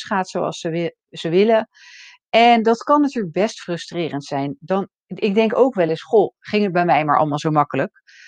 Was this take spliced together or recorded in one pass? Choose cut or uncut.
uncut